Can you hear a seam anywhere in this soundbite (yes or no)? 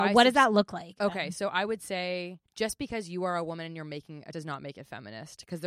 yes